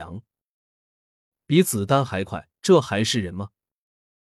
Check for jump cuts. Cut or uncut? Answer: cut